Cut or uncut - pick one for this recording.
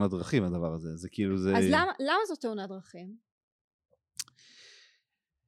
uncut